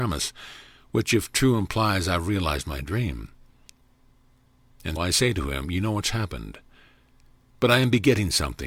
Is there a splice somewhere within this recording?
yes; 1 cut; at 5.0 s

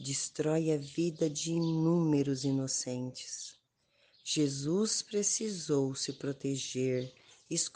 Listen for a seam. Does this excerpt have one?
no; 0 cuts

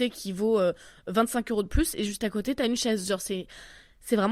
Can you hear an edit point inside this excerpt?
no; 0 cuts

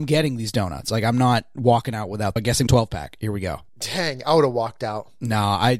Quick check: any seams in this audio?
yes; 3 cuts; at 2.4 s, 2.7 s, 3.7 s

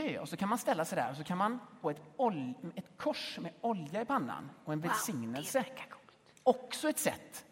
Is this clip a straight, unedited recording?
no; 1 cut; at 1.8 s

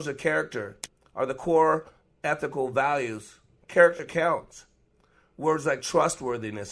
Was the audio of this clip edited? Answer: no; 0 cuts

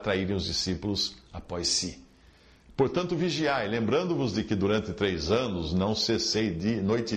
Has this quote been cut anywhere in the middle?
no; 0 cuts

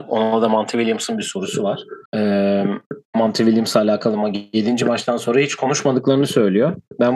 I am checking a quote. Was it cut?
yes; 1 cut; at 2.1 s

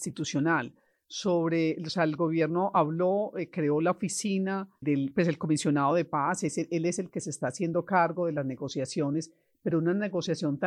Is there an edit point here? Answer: yes; 1 cut; at 4.8 s

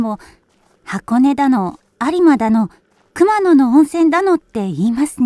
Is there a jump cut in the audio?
no; 0 cuts

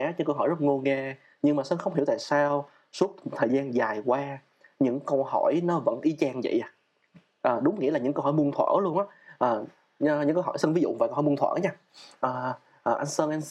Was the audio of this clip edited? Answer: no; 0 cuts

